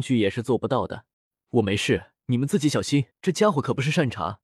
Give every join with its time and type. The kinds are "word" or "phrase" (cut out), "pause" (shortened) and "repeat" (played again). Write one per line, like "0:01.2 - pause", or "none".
0:01.1 - pause
0:02.2 - pause
0:03.1 - pause

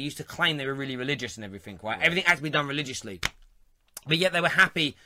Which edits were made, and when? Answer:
none

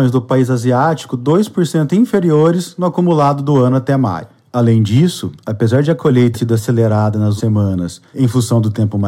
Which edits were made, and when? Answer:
0:06.3 - word
0:07.4 - word

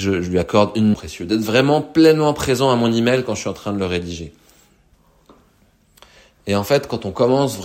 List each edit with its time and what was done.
0:00.9 - phrase

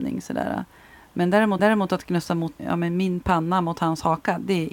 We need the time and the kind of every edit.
0:01.6 - repeat
0:02.6 - word

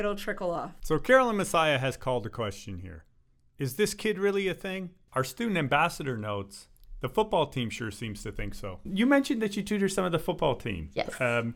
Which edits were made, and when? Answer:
none

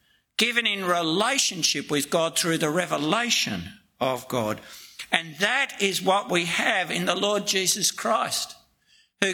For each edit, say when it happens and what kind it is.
none

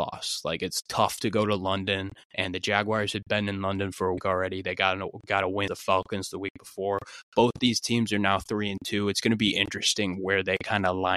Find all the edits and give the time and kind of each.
0:04.2 - word
0:05.7 - word

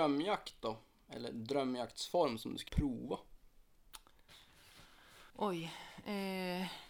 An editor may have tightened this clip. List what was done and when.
0:02.7 - word
0:05.3 - pause

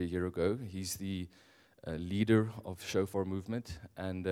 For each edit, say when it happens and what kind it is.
none

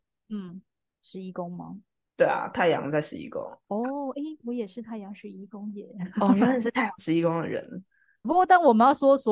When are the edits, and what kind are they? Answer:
0:03.6 - pause
0:08.2 - word

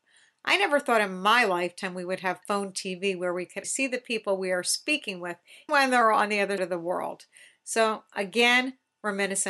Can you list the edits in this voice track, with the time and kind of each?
0:03.6 - word
0:05.7 - word
0:06.6 - word

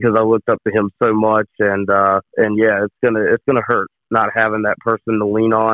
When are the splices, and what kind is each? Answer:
0:02.3 - pause

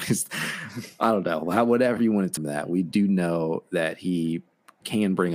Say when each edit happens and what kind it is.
0:02.0 - word
0:02.4 - word

